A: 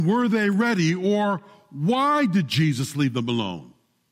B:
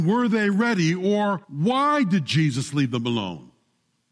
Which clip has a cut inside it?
B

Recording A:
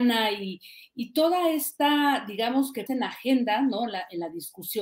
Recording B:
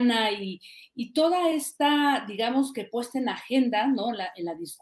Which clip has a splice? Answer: A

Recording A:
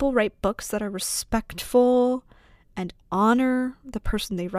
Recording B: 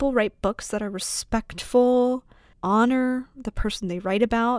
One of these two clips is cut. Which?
B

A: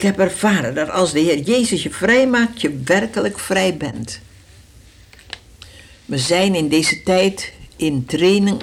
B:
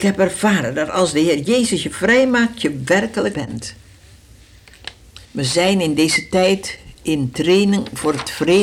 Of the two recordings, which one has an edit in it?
B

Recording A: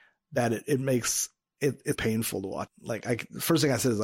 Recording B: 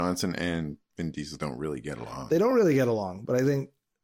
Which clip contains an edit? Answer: A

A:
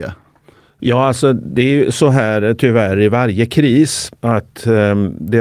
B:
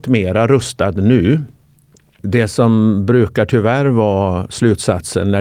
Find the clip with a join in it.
A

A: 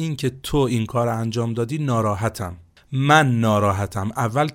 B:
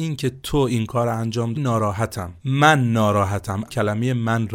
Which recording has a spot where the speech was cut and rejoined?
B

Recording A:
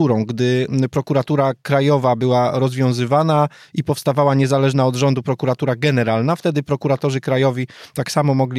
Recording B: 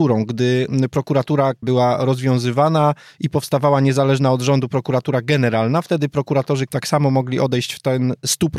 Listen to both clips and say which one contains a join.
B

